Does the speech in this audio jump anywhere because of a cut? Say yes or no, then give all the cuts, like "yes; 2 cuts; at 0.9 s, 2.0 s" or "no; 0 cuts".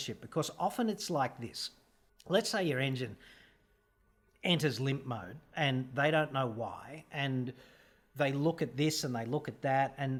yes; 1 cut; at 2.1 s